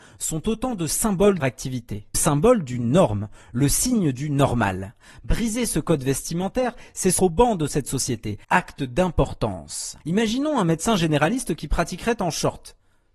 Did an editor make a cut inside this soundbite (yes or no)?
yes